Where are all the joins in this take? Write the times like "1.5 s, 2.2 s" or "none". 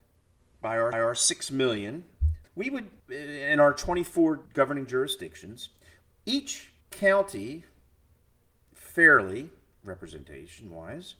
0.9 s, 2.5 s, 3.0 s, 4.5 s, 6.8 s